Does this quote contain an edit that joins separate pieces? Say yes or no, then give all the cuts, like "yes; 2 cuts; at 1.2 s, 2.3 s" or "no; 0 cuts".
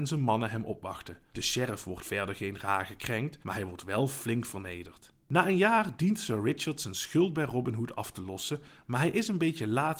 yes; 1 cut; at 3.4 s